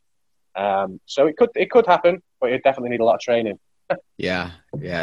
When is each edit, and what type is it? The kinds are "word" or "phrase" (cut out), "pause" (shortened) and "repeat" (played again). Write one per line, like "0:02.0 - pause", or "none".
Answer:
0:01.0 - pause
0:04.1 - pause